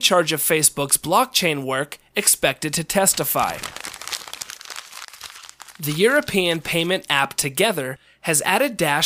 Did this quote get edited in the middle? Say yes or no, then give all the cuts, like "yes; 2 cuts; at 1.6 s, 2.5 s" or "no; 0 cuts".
no; 0 cuts